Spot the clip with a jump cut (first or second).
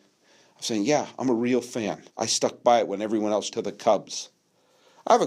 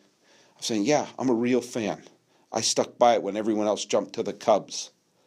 first